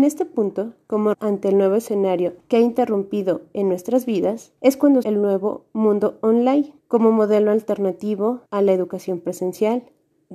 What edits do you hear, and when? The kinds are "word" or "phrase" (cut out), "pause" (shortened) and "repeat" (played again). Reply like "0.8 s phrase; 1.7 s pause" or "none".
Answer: 1.1 s word; 2.4 s pause; 4.6 s pause; 5.0 s word; 6.8 s pause; 8.5 s pause